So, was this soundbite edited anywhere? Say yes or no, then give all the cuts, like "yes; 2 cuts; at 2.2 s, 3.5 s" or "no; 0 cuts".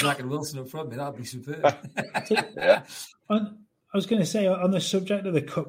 no; 0 cuts